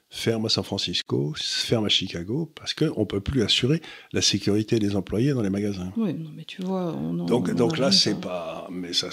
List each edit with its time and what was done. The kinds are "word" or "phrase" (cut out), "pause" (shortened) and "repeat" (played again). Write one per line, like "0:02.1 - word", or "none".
none